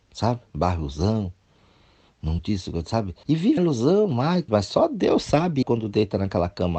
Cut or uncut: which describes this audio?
cut